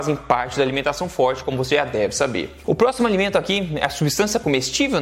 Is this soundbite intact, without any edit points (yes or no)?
yes